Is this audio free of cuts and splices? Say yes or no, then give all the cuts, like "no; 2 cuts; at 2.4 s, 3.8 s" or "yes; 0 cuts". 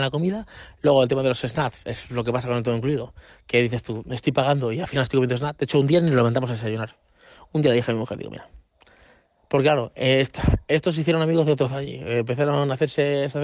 yes; 0 cuts